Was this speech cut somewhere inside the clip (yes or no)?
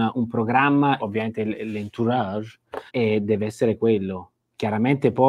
yes